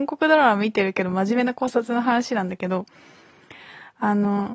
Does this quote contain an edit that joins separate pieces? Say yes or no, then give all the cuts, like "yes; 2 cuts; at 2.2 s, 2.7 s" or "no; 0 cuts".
no; 0 cuts